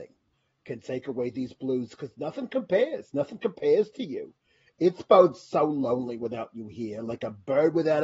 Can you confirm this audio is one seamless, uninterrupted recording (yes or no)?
yes